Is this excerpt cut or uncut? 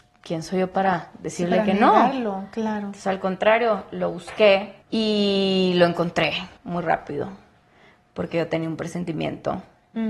cut